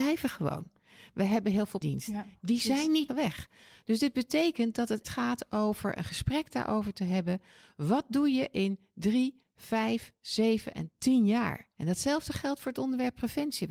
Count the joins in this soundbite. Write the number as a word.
four